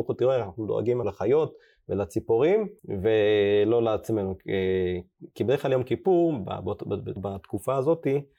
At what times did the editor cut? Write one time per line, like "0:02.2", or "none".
0:01.0
0:02.8
0:07.2